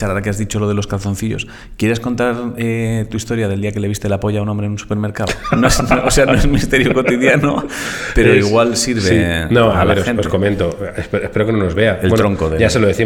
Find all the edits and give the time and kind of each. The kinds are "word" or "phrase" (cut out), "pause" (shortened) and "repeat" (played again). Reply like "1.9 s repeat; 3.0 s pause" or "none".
none